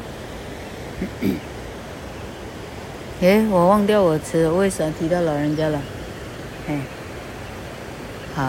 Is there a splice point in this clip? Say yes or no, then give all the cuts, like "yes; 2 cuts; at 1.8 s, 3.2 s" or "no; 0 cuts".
no; 0 cuts